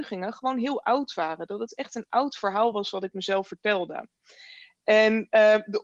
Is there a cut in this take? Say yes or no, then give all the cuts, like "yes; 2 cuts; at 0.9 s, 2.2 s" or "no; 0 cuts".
no; 0 cuts